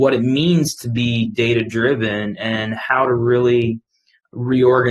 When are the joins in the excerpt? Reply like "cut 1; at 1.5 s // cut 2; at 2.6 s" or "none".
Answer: none